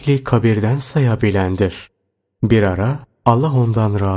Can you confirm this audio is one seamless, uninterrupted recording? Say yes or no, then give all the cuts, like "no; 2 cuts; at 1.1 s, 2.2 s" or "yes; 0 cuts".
yes; 0 cuts